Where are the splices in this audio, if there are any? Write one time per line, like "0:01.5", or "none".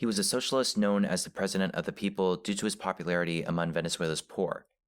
none